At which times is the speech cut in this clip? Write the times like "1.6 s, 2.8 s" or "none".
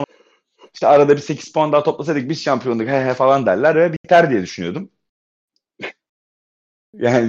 none